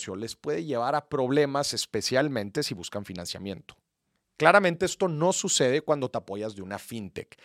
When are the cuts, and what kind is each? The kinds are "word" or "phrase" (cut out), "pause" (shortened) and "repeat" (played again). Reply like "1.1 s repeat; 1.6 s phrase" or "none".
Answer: none